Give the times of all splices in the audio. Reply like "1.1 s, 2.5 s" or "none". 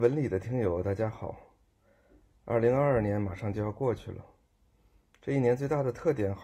none